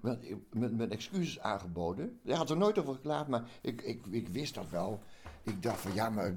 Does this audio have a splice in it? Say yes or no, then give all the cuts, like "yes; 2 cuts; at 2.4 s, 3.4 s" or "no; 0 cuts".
no; 0 cuts